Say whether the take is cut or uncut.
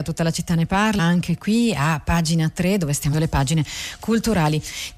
cut